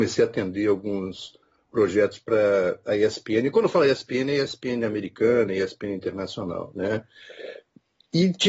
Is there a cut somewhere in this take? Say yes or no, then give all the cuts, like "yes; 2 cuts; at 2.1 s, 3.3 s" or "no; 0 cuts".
no; 0 cuts